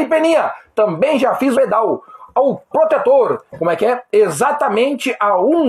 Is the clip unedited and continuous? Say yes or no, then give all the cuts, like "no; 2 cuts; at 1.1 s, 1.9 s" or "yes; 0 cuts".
no; 3 cuts; at 1.5 s, 2.7 s, 3.5 s